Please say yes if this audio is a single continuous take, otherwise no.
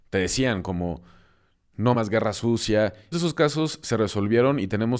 no